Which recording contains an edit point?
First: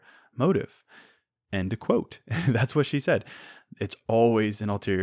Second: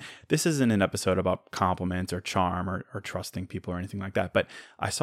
first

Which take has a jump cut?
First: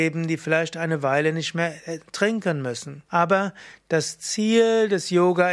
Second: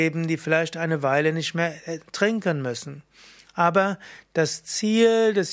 first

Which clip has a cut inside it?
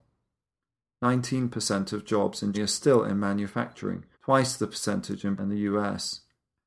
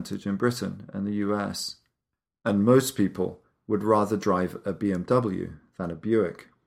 first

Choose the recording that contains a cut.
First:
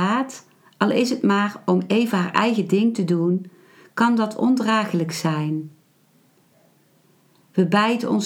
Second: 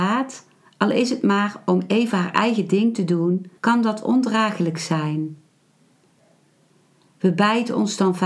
second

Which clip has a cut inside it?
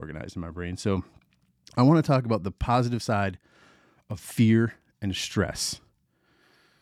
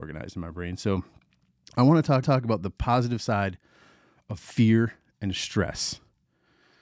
second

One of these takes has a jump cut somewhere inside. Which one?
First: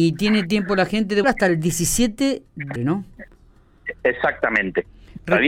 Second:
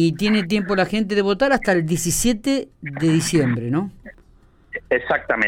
first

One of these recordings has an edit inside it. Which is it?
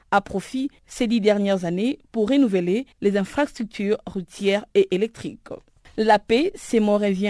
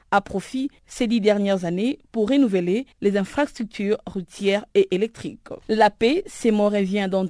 second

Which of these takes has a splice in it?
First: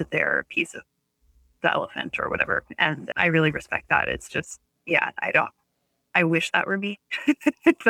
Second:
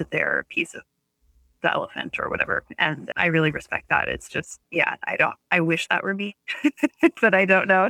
second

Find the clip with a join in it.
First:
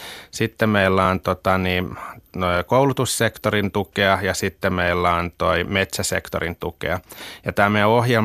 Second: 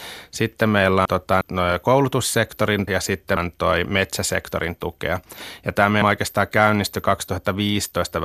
second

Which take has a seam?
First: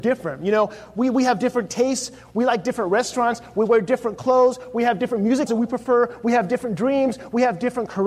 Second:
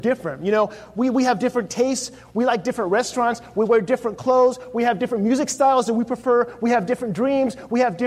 first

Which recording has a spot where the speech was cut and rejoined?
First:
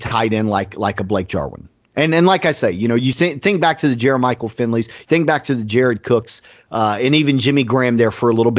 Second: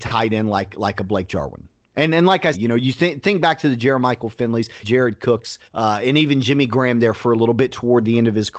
second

